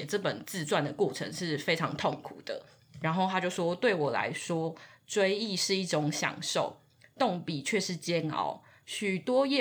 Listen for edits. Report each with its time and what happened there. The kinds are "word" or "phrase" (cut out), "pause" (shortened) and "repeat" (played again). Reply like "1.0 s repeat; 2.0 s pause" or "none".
none

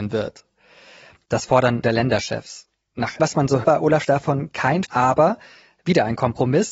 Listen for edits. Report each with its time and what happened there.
1.8 s word; 3.2 s word; 3.6 s word; 4.0 s word; 4.9 s word

